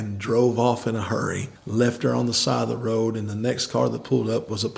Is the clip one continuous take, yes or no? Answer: no